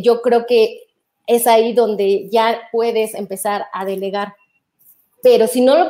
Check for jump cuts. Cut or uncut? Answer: uncut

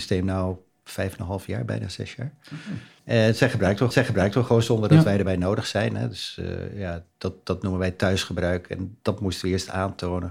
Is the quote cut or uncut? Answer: cut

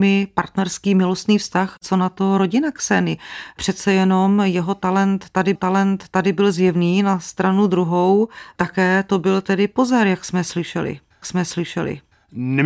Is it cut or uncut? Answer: cut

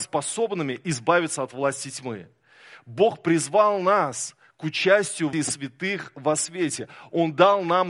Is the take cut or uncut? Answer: cut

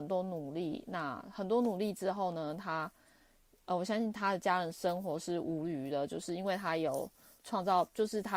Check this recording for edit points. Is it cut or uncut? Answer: uncut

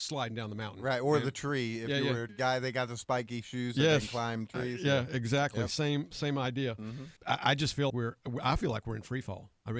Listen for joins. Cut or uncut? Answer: cut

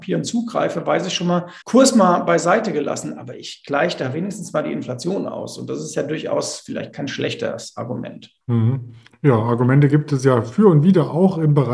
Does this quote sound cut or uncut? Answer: cut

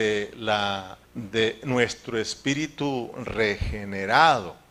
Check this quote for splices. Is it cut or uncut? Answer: cut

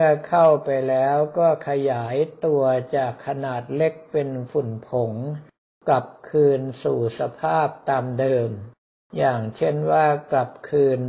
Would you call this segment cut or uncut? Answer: uncut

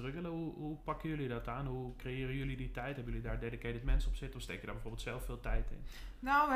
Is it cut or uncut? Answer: uncut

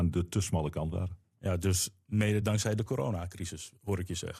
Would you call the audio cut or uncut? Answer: uncut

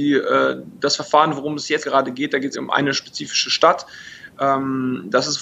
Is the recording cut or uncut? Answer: cut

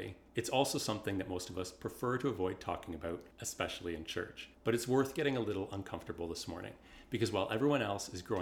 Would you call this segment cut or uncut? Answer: cut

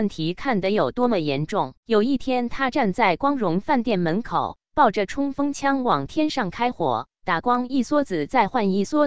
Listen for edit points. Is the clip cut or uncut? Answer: cut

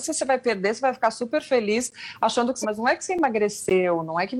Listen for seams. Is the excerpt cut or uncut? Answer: cut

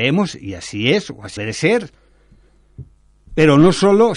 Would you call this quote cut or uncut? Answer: cut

